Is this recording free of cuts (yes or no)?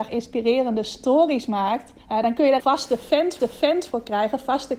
no